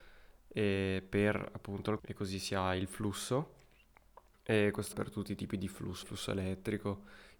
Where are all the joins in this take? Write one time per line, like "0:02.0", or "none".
0:02.0
0:04.3
0:04.9
0:06.0